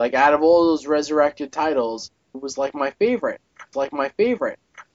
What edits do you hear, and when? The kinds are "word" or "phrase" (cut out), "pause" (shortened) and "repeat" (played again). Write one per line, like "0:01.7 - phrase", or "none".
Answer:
0:02.3 - phrase
0:03.7 - repeat